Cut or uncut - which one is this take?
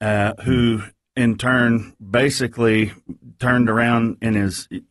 uncut